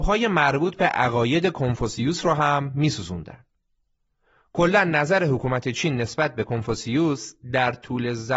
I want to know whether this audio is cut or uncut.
uncut